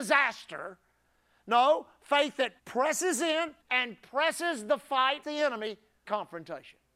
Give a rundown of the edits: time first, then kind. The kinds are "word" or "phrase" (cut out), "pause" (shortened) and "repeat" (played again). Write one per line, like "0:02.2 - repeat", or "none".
0:02.6 - pause
0:03.6 - pause
0:05.2 - word
0:06.1 - word